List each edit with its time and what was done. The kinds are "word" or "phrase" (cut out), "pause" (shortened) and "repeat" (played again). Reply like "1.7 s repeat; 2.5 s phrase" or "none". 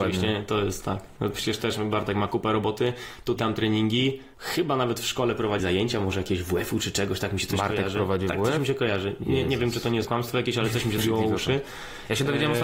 3.4 s word; 4.3 s pause; 5.6 s word; 10.0 s word; 11.0 s word